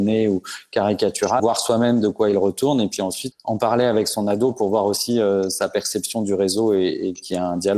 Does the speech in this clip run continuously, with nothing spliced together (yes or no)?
no